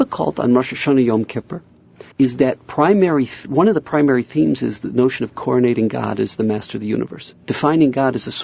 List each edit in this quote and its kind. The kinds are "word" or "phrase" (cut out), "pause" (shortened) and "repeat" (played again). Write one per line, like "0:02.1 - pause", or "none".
0:02.1 - pause